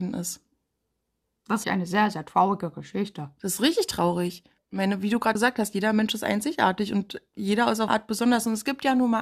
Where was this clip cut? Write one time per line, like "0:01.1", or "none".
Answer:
0:01.6
0:04.6
0:05.3
0:07.9